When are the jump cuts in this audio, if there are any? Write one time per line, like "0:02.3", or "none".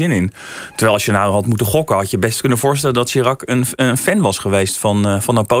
none